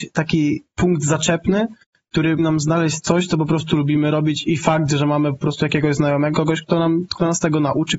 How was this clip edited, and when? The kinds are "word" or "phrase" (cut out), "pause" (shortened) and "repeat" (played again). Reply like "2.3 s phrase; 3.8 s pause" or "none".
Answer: 2.4 s word; 6.3 s word

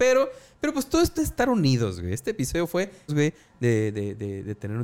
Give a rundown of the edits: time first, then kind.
1.2 s word; 3.1 s phrase

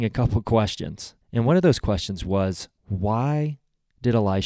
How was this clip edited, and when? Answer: 1.2 s pause; 2.8 s pause

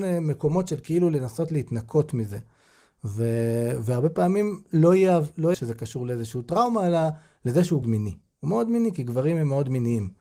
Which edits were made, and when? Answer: 5.5 s phrase; 7.8 s phrase

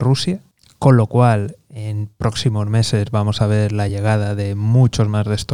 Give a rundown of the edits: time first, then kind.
none

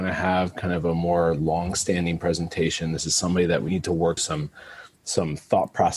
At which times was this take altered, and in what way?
2.2 s word; 3.7 s word; 4.2 s word

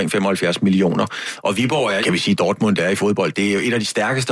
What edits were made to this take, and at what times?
2.0 s phrase

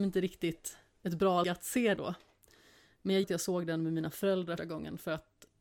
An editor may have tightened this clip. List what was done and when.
1.4 s word; 2.0 s word; 3.2 s word; 4.6 s word

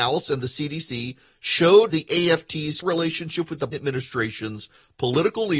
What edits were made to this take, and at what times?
1.9 s word; 2.8 s word; 3.7 s word

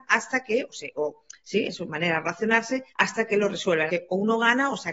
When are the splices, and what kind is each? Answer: 2.9 s pause; 3.9 s word

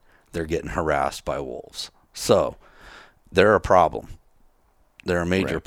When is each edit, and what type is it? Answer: none

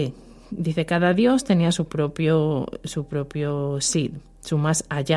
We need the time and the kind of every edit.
none

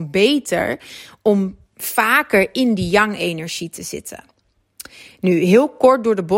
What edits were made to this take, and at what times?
none

